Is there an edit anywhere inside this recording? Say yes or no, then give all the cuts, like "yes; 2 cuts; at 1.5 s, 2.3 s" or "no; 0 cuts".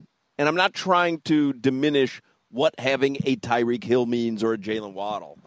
no; 0 cuts